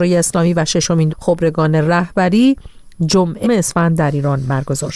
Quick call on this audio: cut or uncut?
cut